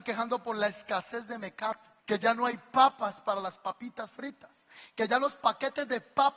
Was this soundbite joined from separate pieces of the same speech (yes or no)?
yes